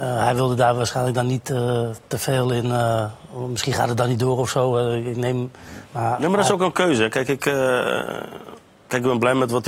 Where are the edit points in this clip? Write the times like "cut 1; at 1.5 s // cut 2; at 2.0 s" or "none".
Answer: none